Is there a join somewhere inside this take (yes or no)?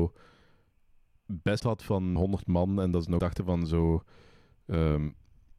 yes